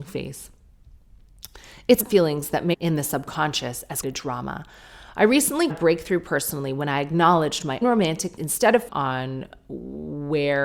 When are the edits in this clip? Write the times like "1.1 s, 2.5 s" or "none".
2.0 s, 2.7 s, 4.0 s, 5.7 s, 7.8 s, 8.4 s, 8.9 s